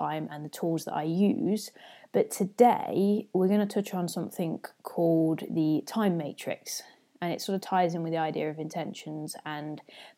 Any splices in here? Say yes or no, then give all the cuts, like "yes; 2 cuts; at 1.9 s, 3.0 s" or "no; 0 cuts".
no; 0 cuts